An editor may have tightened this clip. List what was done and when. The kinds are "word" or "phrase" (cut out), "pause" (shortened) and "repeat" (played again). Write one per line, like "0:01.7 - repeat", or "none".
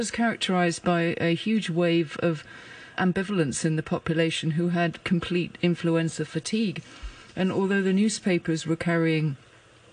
0:03.0 - word